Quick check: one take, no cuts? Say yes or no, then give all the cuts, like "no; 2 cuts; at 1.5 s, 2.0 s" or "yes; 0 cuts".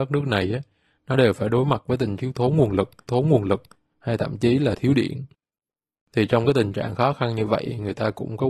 no; 2 cuts; at 2.2 s, 3.1 s